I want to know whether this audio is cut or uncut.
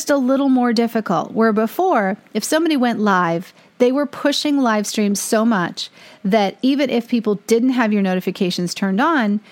uncut